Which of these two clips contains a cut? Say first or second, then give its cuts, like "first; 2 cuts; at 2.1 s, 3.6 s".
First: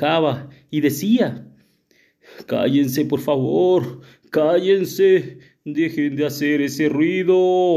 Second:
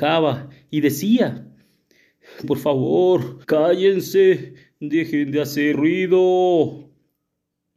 second; 3 cuts; at 2.4 s, 3.4 s, 5.7 s